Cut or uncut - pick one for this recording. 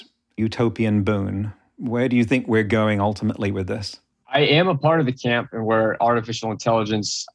uncut